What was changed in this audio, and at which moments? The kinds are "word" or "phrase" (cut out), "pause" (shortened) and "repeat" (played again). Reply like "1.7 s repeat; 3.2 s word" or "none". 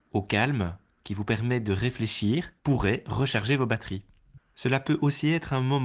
2.6 s pause